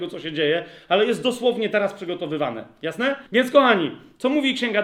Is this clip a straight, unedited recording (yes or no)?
no